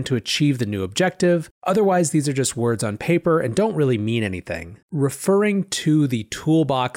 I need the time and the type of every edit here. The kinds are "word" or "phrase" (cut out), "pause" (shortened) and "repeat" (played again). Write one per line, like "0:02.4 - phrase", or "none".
0:01.5 - pause
0:04.8 - pause